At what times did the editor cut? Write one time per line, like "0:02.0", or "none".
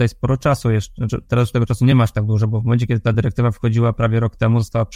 none